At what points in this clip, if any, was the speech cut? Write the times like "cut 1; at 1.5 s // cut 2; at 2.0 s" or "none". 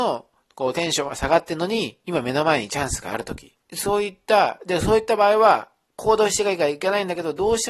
cut 1; at 3.6 s